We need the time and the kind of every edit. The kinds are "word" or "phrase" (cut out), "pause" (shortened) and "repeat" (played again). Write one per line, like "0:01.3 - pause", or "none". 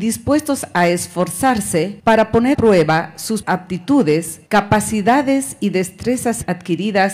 0:02.0 - pause
0:02.5 - word
0:03.4 - word
0:04.5 - pause